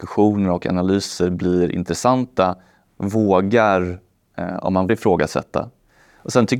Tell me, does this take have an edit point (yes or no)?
yes